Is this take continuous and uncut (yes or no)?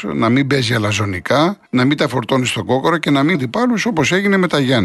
no